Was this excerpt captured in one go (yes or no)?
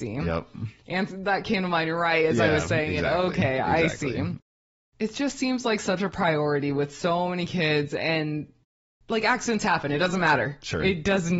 yes